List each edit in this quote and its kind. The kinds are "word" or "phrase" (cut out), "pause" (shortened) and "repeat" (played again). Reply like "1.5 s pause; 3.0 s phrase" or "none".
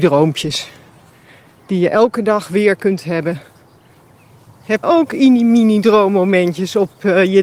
4.8 s word